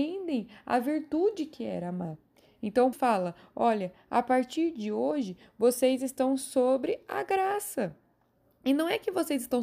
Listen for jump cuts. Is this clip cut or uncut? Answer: cut